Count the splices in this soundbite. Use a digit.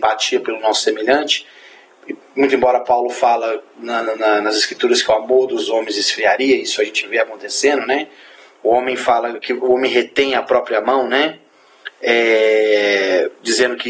0